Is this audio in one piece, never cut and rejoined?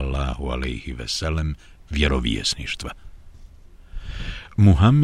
yes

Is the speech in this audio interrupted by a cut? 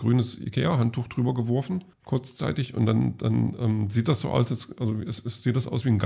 yes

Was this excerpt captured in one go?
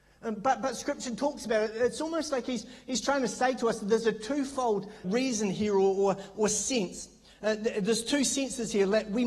no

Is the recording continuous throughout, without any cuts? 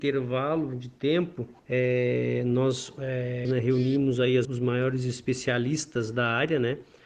no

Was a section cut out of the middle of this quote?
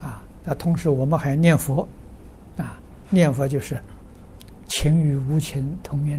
no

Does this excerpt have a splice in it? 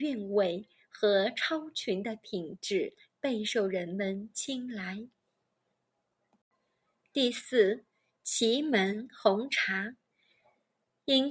no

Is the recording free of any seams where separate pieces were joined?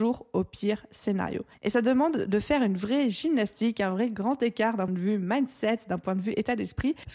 no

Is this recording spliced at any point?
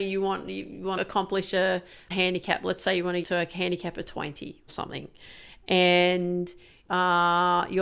yes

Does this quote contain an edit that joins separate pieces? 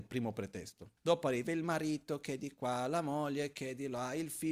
yes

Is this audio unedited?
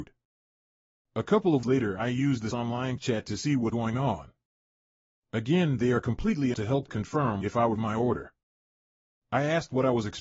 no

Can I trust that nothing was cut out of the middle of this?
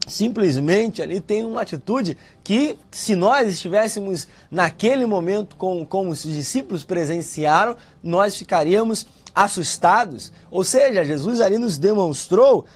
yes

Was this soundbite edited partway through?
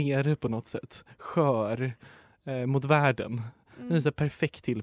no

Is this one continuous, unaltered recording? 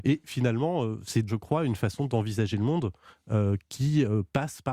no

